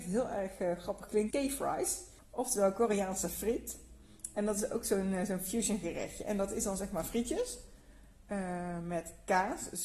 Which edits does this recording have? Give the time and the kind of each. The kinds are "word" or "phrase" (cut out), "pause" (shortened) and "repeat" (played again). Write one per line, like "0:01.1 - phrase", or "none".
0:01.3 - word
0:02.2 - pause